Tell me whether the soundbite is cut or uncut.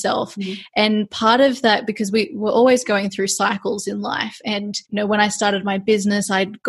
cut